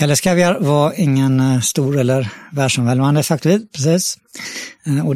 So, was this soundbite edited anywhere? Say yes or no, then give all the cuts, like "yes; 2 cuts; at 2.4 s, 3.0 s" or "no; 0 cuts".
no; 0 cuts